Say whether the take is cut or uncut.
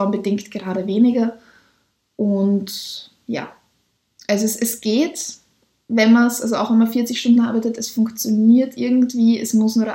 uncut